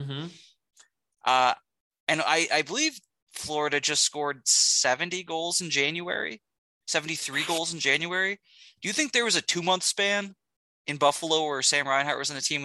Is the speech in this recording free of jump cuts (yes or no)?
yes